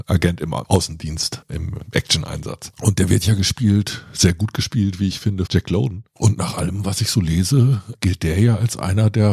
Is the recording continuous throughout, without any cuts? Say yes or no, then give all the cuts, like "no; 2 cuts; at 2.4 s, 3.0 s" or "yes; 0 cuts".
no; 1 cut; at 5.5 s